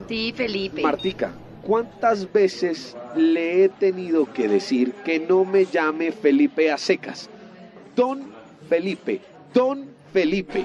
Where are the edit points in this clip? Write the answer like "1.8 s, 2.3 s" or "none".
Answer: none